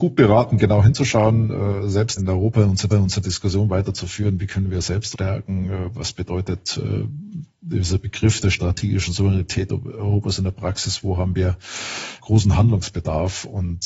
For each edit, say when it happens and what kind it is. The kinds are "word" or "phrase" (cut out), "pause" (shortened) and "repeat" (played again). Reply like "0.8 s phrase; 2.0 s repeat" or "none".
2.2 s word; 2.9 s repeat; 5.1 s word; 7.5 s pause; 12.2 s word

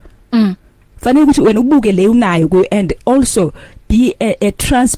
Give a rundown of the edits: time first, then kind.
none

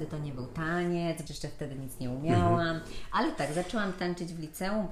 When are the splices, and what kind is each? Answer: 1.3 s word

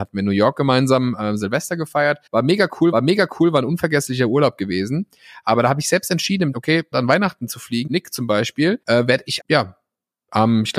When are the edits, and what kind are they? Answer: 2.3 s pause; 2.9 s repeat; 6.5 s word; 6.9 s word; 7.9 s word; 8.8 s pause; 9.4 s phrase

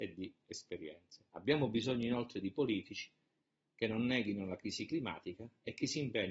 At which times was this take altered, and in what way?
1.3 s pause

